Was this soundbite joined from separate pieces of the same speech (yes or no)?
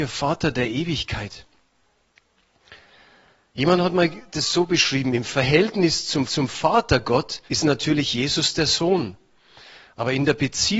yes